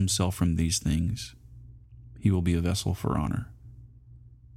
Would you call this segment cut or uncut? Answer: uncut